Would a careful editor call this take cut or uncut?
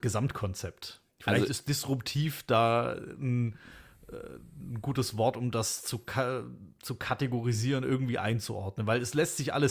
cut